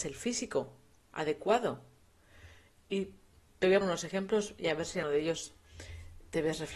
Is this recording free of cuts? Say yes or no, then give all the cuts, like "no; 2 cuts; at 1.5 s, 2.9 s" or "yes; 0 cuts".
no; 3 cuts; at 3.3 s, 3.8 s, 5.0 s